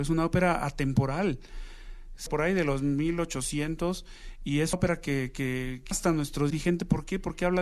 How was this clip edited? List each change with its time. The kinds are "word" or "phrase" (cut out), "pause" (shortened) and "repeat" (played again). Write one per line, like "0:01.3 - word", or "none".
0:02.3 - word
0:04.7 - word
0:05.9 - word
0:06.5 - word